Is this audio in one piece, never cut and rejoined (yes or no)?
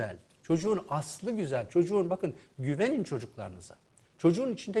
yes